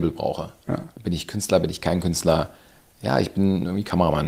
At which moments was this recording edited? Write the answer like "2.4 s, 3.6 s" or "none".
none

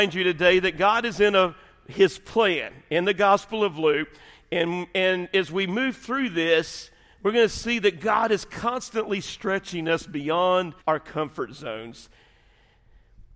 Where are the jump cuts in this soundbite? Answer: 10.8 s

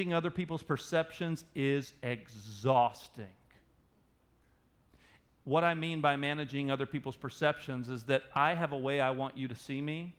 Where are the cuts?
none

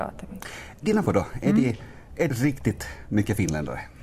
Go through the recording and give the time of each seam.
1.0 s, 2.3 s

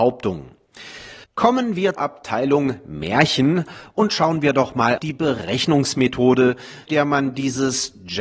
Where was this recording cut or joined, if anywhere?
1.2 s, 2.0 s, 5.0 s, 6.9 s

